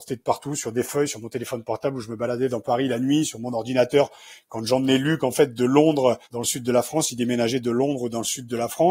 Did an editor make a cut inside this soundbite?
yes; 1 cut; at 6.2 s

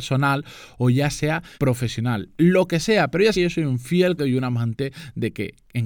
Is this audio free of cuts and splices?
no; 3 cuts; at 1.5 s, 3.3 s, 4.2 s

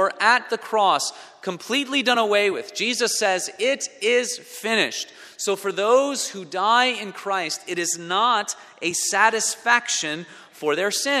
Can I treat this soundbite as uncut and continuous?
yes; 0 cuts

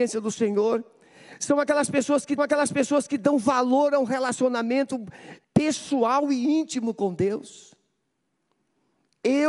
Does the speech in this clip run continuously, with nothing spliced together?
no; 2 cuts; at 2.4 s, 5.4 s

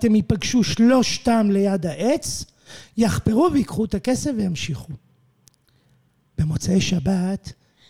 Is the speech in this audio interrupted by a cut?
no; 0 cuts

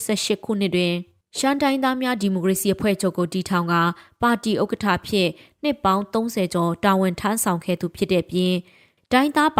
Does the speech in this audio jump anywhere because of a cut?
no; 0 cuts

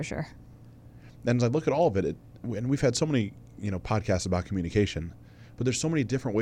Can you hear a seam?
no; 0 cuts

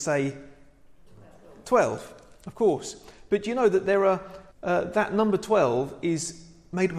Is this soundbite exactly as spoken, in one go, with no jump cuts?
no; 1 cut; at 4.5 s

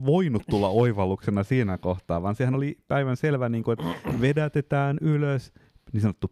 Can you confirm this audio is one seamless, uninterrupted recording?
yes; 0 cuts

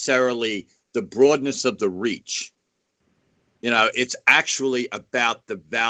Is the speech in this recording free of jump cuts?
yes; 0 cuts

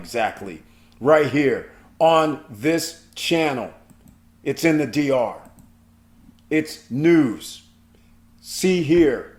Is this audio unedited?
yes; 0 cuts

